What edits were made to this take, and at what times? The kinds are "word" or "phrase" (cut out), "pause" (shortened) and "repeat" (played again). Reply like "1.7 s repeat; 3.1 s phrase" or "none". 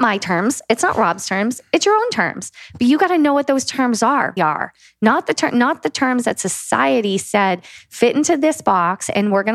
4.4 s word

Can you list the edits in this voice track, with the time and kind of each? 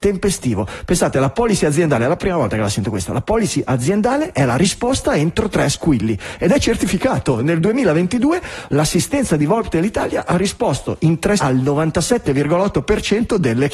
11.4 s word

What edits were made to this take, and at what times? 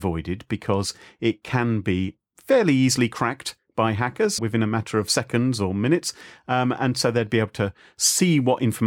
4.4 s word

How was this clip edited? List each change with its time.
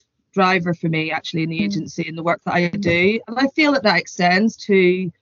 none

